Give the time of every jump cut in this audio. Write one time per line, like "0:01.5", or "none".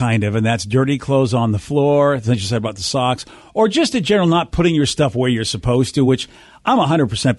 none